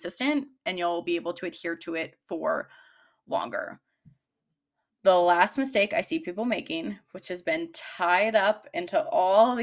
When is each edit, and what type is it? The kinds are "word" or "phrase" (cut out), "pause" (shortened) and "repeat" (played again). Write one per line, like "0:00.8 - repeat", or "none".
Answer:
none